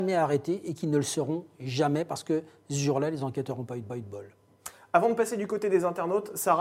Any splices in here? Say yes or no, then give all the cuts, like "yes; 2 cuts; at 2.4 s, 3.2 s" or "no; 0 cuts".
yes; 1 cut; at 3.9 s